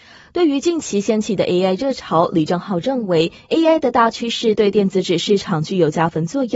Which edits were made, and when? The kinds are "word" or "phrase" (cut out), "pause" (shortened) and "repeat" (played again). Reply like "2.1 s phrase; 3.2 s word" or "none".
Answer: none